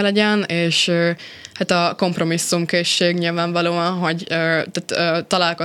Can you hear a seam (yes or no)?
no